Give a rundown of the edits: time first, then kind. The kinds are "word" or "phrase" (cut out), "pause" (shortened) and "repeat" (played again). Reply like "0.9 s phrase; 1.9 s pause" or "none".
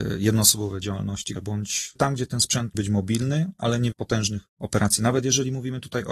1.3 s word; 2.0 s word; 2.7 s word; 3.9 s phrase; 4.5 s pause